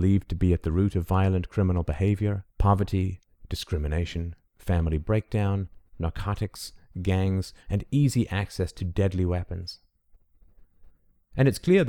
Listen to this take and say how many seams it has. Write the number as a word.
one